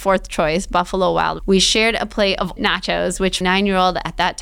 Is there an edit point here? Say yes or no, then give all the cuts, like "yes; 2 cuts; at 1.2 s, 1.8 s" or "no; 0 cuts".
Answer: yes; 3 cuts; at 1.4 s, 2.6 s, 3.4 s